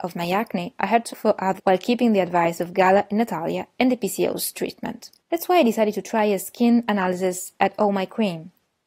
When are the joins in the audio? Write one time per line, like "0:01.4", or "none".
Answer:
0:01.1
0:01.6
0:05.2